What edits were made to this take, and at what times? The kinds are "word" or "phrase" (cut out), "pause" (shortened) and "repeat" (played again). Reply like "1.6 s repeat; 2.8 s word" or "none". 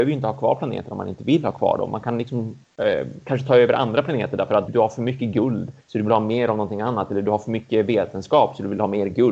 2.6 s pause; 4.7 s word; 5.8 s pause